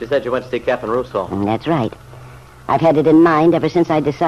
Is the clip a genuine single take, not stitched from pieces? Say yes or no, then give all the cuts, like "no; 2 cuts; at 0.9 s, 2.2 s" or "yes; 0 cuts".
yes; 0 cuts